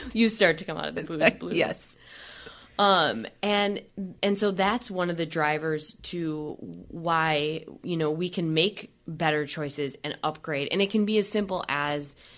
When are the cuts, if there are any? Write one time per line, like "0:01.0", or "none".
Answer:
0:04.2